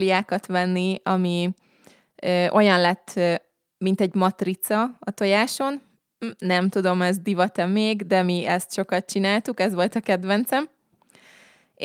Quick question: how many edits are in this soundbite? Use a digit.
0